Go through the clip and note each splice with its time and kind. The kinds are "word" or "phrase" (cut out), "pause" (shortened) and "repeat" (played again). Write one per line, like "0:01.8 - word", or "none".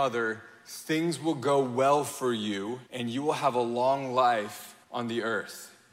0:02.9 - pause
0:04.8 - pause